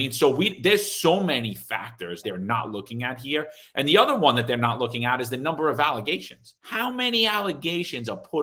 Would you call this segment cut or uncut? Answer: cut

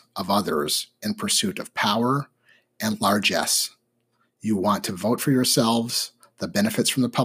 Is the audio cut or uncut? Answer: uncut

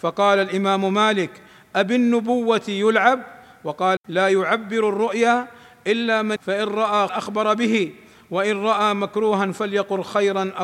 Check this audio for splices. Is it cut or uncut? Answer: cut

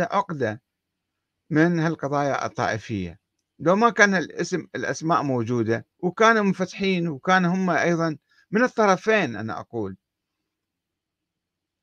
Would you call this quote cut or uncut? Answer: cut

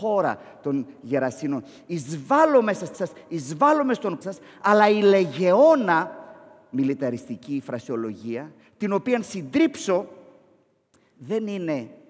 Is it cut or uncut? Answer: cut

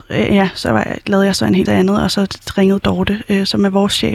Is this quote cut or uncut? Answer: cut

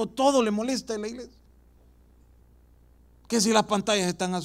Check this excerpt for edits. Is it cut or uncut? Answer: uncut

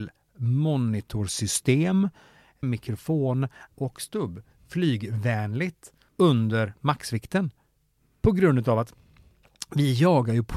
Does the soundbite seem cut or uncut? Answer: cut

